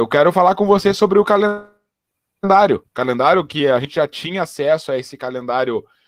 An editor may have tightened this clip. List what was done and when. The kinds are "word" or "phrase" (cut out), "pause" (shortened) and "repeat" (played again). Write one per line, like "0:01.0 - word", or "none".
0:02.9 - pause